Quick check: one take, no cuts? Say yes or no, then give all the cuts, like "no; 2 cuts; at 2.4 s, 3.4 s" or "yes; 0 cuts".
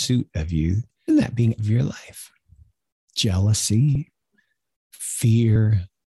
no; 2 cuts; at 1.1 s, 1.6 s